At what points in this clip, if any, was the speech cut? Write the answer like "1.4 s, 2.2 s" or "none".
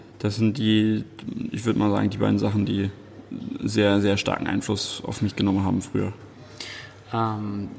none